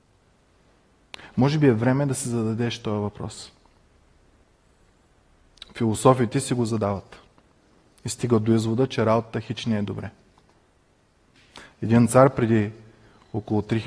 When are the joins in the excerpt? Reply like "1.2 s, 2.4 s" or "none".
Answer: none